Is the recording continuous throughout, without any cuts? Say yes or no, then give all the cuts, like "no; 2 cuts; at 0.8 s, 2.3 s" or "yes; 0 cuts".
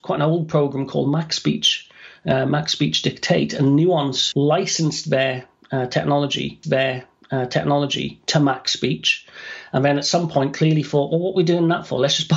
no; 2 cuts; at 4.3 s, 6.6 s